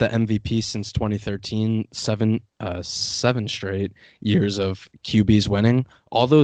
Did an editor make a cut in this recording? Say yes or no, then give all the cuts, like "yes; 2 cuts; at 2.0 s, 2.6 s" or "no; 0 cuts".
no; 0 cuts